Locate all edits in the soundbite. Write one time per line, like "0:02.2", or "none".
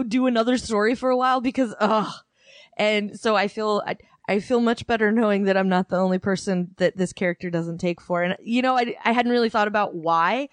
none